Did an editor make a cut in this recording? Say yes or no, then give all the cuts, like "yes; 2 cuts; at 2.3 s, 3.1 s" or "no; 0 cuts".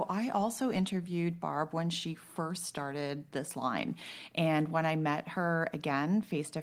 no; 0 cuts